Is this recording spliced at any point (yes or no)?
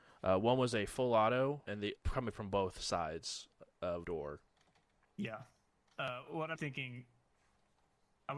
yes